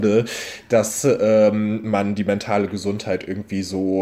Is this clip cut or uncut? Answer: uncut